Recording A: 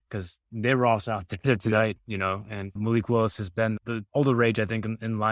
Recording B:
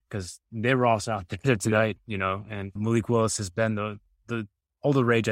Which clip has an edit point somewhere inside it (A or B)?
A